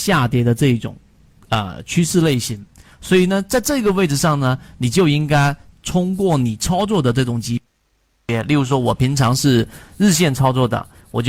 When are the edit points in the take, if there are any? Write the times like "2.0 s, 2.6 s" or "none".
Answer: none